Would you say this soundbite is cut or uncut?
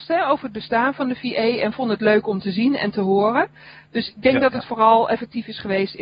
uncut